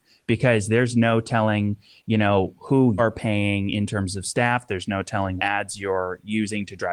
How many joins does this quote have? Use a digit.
2